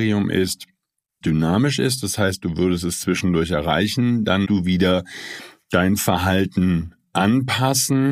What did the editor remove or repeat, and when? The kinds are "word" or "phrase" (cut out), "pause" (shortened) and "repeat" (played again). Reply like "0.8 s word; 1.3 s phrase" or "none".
1.2 s word; 4.4 s word